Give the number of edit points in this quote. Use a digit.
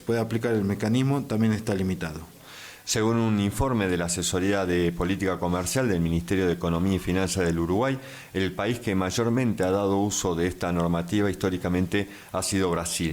0